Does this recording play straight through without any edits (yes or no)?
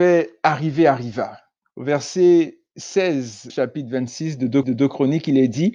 no